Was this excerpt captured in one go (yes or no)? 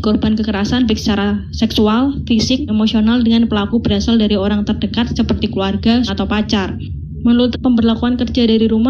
no